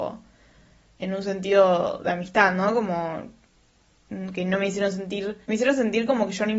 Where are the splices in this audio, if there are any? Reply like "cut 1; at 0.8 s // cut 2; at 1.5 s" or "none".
cut 1; at 5.4 s